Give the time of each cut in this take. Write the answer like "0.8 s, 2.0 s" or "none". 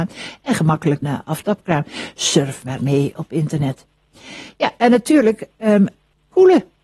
1.0 s, 2.8 s